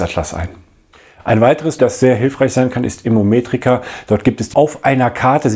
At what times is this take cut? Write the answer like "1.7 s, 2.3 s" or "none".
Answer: 1.8 s, 4.5 s